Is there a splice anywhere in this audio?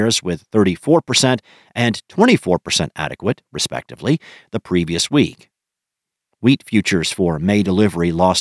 no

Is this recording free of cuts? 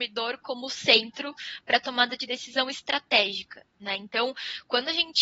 yes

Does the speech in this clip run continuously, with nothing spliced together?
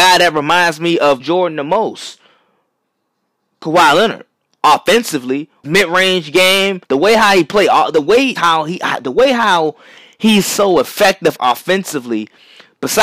no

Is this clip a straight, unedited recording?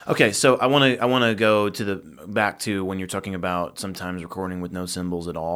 yes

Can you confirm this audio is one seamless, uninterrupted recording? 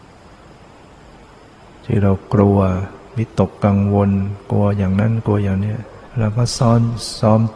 no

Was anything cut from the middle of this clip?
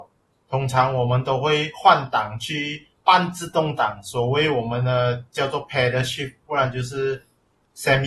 yes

